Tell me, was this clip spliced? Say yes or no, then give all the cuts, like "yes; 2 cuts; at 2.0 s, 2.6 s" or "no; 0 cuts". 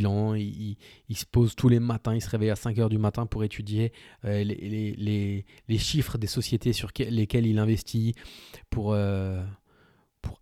no; 0 cuts